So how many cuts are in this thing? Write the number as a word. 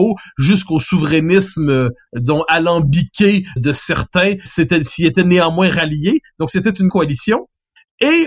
four